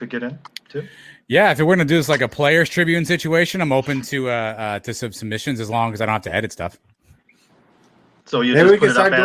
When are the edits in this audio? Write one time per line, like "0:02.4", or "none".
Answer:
none